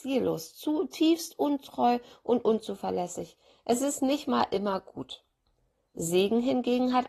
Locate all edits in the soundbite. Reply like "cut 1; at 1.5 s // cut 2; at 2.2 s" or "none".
none